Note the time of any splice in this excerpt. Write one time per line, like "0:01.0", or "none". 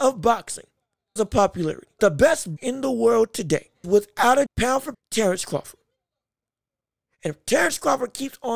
0:01.2
0:02.0
0:02.6
0:03.8
0:04.5
0:04.9